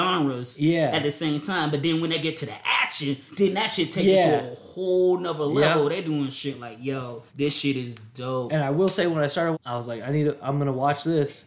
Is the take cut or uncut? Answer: cut